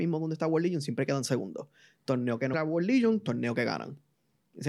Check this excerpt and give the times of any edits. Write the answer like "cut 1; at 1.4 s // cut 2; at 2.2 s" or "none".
cut 1; at 2.5 s